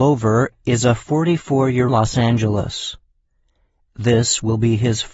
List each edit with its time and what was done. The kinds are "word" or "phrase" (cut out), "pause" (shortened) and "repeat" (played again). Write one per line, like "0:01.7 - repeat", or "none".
0:01.9 - phrase